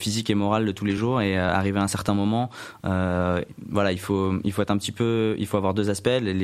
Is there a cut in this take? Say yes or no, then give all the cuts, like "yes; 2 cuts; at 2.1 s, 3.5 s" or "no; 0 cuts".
no; 0 cuts